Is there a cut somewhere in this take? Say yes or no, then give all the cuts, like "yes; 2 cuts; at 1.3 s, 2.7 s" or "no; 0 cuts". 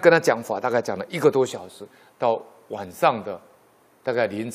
no; 0 cuts